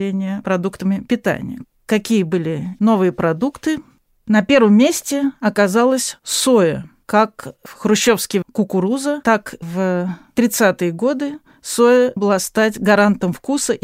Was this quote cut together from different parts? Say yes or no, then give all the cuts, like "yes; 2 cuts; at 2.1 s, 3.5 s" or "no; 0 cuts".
yes; 3 cuts; at 2.8 s, 8.4 s, 12.2 s